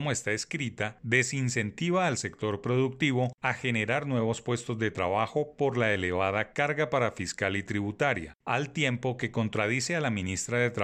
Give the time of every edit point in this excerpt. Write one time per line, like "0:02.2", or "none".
none